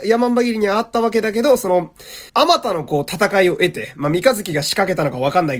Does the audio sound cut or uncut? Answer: cut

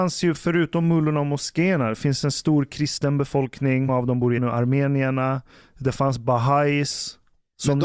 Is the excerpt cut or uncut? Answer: cut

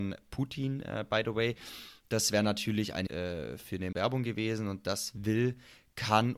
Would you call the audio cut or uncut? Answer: cut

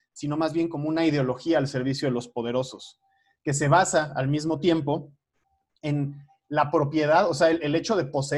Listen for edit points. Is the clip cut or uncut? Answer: uncut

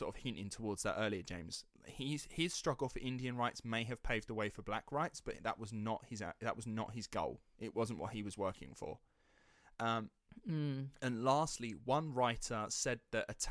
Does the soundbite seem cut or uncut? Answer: uncut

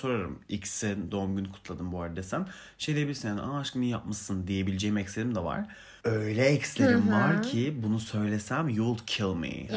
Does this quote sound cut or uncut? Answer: cut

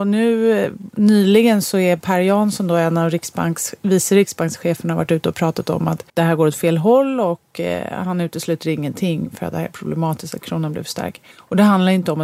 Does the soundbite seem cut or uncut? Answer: cut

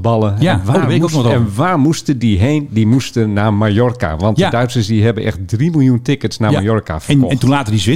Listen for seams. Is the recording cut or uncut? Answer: uncut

